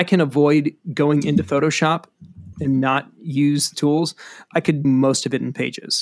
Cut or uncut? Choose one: cut